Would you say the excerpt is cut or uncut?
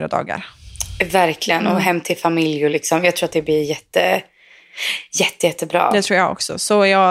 uncut